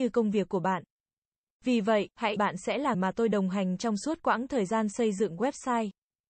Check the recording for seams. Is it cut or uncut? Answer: cut